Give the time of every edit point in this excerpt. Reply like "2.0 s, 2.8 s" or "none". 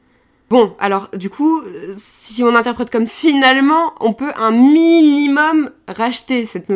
3.1 s